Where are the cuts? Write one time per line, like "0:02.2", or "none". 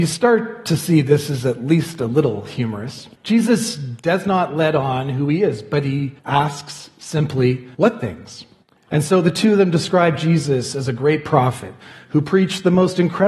0:03.1
0:06.2
0:07.7
0:08.6